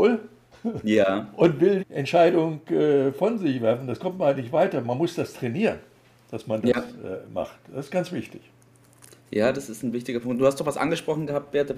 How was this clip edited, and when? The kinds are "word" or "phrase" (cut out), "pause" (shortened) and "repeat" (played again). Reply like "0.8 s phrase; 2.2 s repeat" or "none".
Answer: 1.8 s word